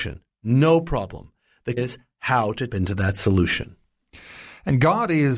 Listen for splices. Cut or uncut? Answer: cut